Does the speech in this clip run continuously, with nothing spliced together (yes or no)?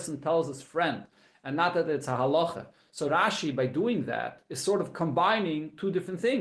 yes